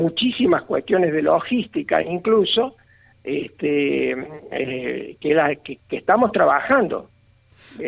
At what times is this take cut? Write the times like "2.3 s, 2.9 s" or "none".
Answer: none

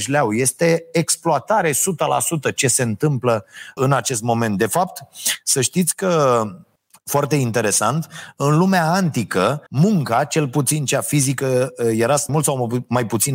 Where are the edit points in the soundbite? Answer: 3.8 s, 6.8 s, 9.7 s, 12.3 s

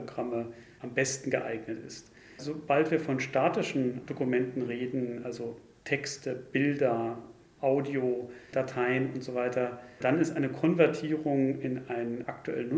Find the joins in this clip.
none

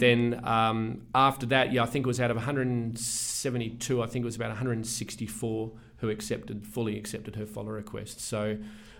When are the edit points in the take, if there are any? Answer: none

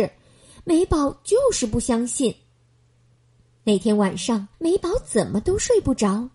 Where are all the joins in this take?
4.5 s

